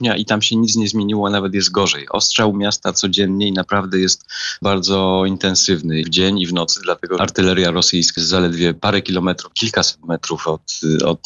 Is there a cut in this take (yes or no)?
yes